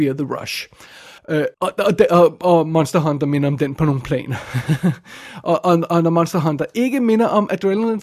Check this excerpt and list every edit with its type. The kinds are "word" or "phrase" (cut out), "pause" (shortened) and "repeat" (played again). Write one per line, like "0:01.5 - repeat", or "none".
0:01.2 - pause
0:01.5 - pause